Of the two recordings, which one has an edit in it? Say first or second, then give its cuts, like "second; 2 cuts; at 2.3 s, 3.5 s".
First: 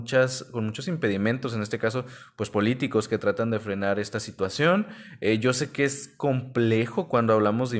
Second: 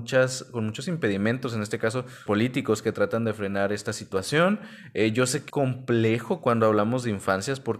second; 2 cuts; at 2.3 s, 5.5 s